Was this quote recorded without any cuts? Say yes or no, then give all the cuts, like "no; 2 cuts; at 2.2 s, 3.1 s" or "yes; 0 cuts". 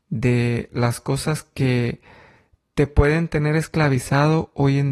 yes; 0 cuts